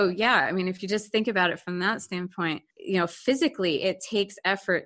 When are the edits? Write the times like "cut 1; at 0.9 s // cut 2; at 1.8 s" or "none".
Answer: cut 1; at 2.7 s